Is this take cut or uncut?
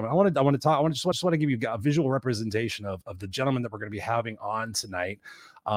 cut